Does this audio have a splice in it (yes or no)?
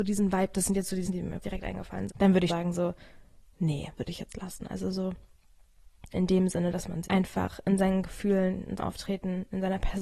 yes